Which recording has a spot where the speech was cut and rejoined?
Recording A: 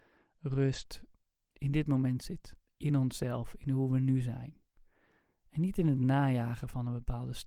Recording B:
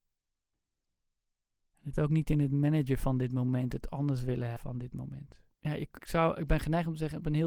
B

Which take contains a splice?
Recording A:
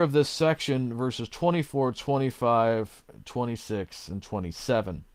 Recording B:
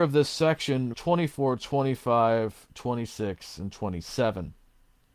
B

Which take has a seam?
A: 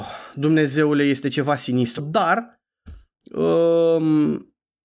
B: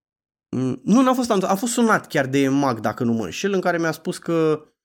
A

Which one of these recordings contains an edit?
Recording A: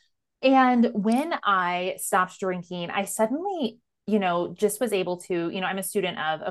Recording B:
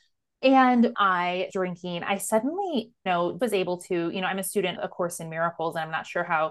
B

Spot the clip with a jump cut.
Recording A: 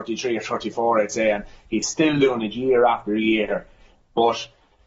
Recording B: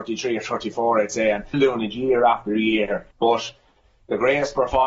B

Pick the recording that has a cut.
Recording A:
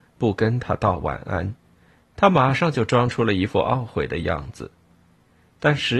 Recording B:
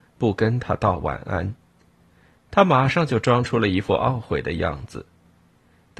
A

